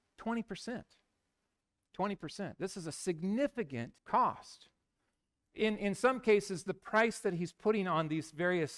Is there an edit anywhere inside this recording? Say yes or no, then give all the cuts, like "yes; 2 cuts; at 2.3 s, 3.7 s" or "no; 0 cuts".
yes; 1 cut; at 4.0 s